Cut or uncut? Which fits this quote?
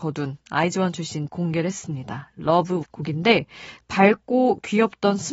cut